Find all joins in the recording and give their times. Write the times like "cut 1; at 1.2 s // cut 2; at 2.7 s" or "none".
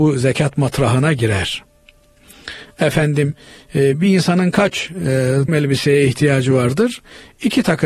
cut 1; at 5.5 s